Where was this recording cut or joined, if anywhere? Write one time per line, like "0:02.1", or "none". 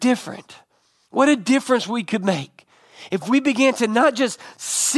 none